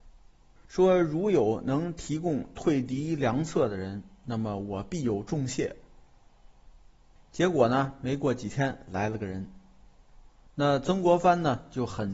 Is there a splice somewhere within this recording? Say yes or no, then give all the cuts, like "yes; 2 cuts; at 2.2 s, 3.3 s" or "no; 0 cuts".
no; 0 cuts